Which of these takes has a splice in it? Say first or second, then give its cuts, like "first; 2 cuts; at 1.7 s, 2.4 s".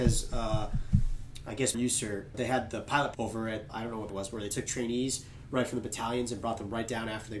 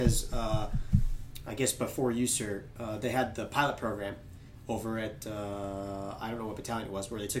first; 6 cuts; at 1.7 s, 2.3 s, 3.1 s, 3.7 s, 4.1 s, 4.7 s